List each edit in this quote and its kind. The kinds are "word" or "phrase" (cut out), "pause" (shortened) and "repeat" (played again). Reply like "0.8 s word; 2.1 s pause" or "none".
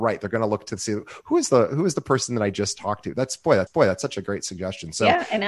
3.7 s repeat

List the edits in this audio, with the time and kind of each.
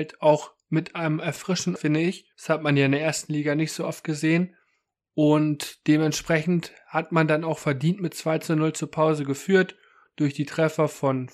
1.8 s word; 2.3 s pause; 4.7 s pause

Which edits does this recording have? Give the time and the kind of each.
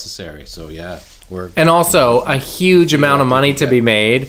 1.2 s pause

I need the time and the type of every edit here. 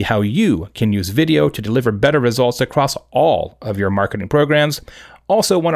none

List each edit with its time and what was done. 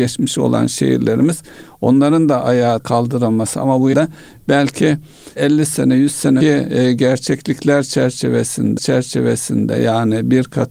2.8 s word; 3.9 s word; 5.4 s word; 6.4 s word; 8.8 s repeat

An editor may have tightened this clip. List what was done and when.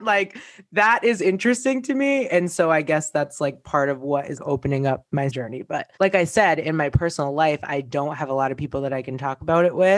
4.4 s word; 5.3 s word; 6.0 s pause

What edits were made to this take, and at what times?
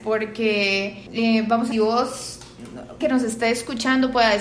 1.1 s pause; 1.7 s phrase; 3.0 s phrase

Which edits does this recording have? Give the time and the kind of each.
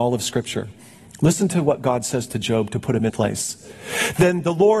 3.1 s word

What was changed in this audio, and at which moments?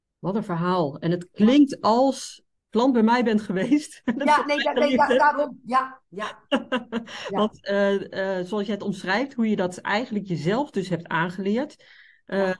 2.5 s phrase

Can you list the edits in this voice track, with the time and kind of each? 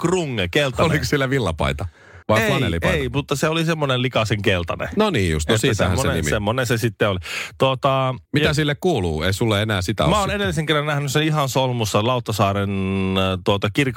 2.2 s pause; 8.3 s pause

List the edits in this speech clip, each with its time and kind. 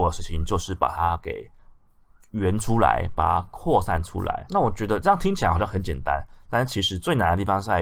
none

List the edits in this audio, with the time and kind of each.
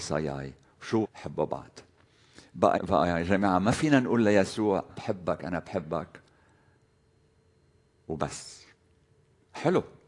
1.0 s word; 2.8 s word; 4.9 s word

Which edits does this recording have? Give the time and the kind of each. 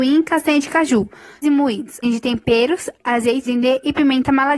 1.4 s word; 2.0 s word; 3.5 s word

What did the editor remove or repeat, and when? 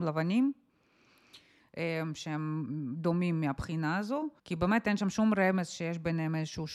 4.4 s pause

